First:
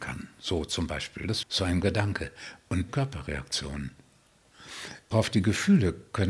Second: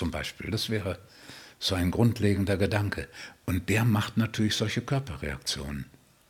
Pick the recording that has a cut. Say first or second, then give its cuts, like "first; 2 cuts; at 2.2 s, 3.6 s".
first; 4 cuts; at 1.4 s, 1.8 s, 2.9 s, 5.1 s